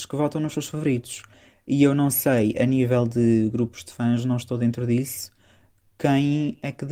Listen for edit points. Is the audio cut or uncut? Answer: uncut